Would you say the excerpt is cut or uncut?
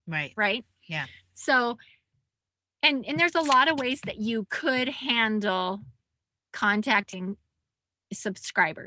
uncut